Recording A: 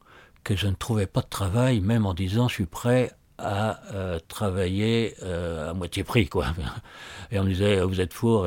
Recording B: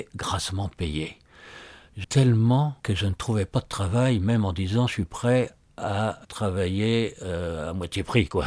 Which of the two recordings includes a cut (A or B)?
B